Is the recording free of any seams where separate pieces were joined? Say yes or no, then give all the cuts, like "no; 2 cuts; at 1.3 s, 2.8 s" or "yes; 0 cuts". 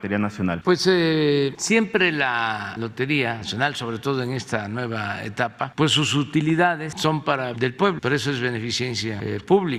no; 1 cut; at 7.5 s